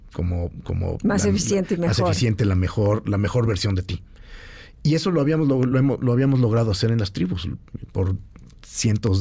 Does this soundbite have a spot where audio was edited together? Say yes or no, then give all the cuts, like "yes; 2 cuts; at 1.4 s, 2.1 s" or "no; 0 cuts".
no; 0 cuts